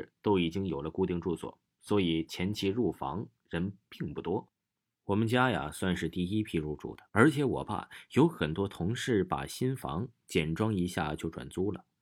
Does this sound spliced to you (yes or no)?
yes